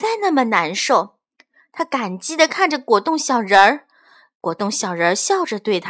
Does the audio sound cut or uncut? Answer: uncut